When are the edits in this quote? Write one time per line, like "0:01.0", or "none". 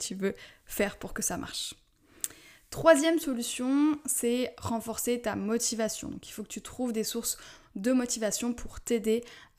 none